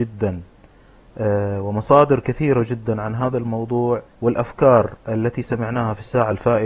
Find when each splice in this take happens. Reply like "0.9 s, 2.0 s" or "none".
4.1 s